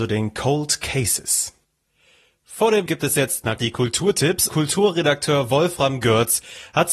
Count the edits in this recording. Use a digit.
3